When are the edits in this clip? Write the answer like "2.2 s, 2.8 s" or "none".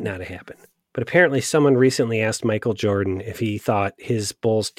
none